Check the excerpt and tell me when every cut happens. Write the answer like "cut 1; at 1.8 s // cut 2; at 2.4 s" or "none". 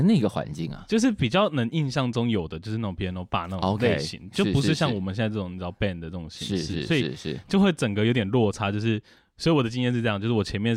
none